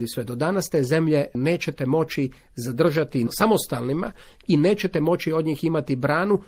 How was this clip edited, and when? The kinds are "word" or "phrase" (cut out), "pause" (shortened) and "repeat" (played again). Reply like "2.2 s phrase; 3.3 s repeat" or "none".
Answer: none